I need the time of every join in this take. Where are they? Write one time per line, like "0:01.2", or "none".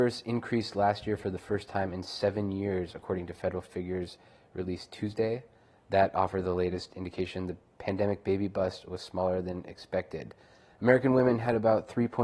none